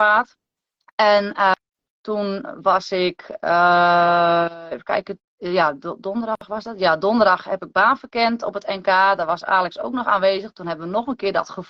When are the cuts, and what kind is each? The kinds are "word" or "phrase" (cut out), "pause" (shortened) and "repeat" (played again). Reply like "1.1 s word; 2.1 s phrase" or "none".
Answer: 1.9 s word; 5.3 s pause